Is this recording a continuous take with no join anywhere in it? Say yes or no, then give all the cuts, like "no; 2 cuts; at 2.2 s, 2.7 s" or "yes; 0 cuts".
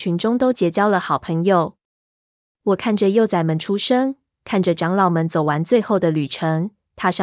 yes; 0 cuts